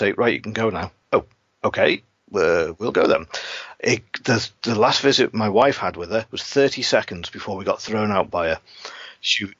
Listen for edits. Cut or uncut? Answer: uncut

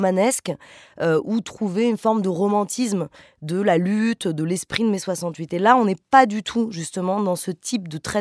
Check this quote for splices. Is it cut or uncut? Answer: uncut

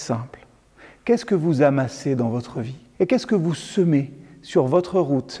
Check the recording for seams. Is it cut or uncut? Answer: cut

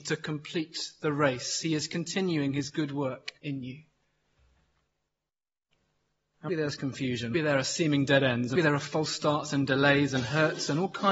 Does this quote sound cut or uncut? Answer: cut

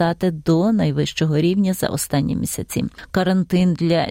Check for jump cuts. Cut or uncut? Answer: uncut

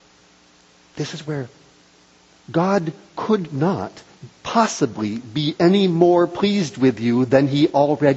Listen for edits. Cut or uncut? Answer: uncut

